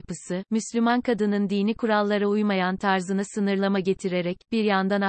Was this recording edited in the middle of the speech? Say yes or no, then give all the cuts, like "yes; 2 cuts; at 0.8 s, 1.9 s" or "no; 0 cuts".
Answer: no; 0 cuts